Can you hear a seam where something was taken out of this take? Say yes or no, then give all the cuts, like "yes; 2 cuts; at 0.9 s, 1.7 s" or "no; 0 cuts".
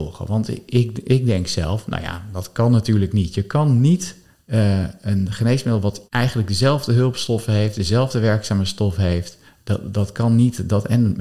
yes; 3 cuts; at 4.3 s, 6.1 s, 9.5 s